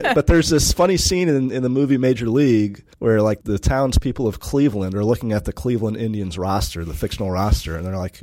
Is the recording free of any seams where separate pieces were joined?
no; 2 cuts; at 2.9 s, 3.4 s

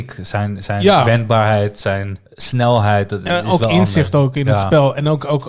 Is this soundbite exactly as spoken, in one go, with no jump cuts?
no; 1 cut; at 2.3 s

